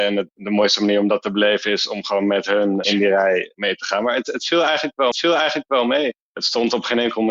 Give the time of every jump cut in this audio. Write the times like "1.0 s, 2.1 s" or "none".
2.8 s, 5.1 s